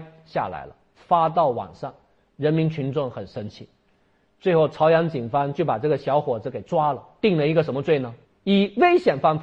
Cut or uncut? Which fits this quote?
cut